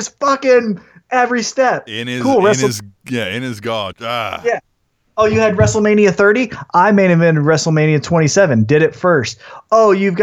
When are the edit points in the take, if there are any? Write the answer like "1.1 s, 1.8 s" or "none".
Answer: 3.9 s